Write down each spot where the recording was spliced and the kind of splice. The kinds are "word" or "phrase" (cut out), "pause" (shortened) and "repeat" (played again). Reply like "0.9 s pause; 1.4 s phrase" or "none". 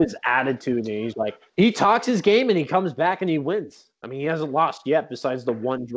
1.1 s word; 1.5 s pause